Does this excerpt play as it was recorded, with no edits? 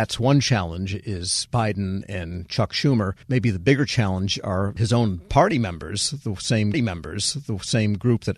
no; 3 cuts; at 1.5 s, 3.2 s, 6.7 s

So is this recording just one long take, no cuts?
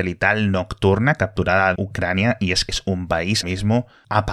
no; 3 cuts; at 1.8 s, 2.7 s, 3.4 s

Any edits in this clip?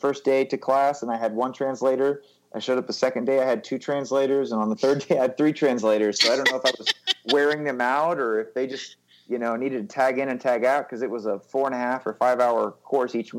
no; 0 cuts

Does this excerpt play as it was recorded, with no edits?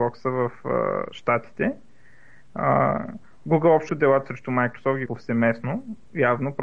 no; 2 cuts; at 3.9 s, 5.1 s

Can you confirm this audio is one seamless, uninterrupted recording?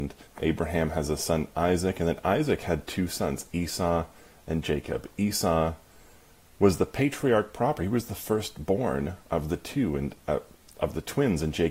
yes; 0 cuts

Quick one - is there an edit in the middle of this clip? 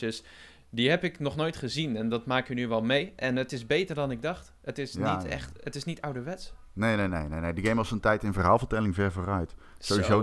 no; 0 cuts

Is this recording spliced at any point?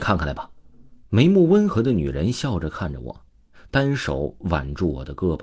yes; 1 cut; at 1.0 s

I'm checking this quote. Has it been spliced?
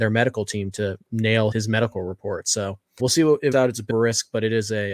yes; 5 cuts; at 1.0 s, 1.5 s, 3.0 s, 3.5 s, 3.9 s

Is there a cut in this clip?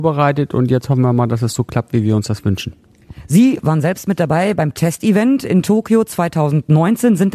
no; 0 cuts

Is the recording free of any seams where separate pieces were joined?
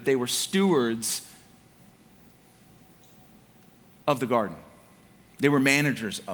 yes; 0 cuts

